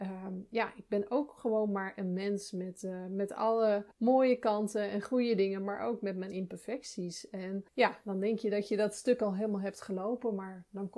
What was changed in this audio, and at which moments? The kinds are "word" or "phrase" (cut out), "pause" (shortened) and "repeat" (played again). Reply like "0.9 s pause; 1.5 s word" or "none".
3.9 s pause; 7.7 s pause